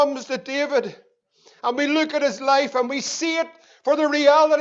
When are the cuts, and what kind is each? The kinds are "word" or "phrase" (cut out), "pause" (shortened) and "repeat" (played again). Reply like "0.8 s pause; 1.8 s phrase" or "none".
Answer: none